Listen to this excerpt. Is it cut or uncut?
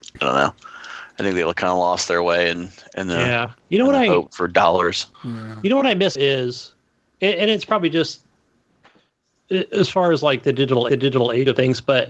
cut